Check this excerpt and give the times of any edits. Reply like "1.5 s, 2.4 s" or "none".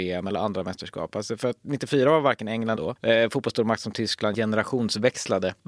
2.8 s